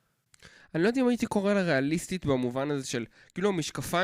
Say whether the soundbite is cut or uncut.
uncut